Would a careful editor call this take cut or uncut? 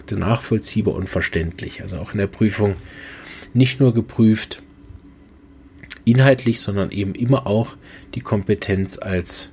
uncut